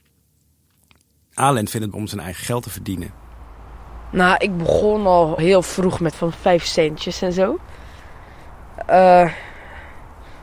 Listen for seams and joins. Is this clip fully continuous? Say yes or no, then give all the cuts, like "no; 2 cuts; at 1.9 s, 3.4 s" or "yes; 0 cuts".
no; 3 cuts; at 1.9 s, 5.4 s, 6.1 s